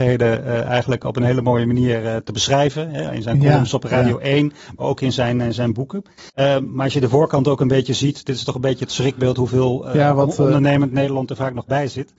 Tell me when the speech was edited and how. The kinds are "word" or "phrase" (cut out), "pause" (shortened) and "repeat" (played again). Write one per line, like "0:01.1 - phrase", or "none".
0:06.3 - pause